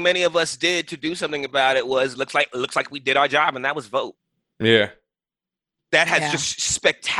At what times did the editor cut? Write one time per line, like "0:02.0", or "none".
none